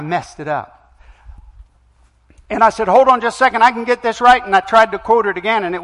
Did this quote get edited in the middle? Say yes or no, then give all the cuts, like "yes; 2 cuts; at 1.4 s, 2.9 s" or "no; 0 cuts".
no; 0 cuts